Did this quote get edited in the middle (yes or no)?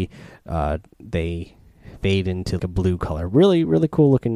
yes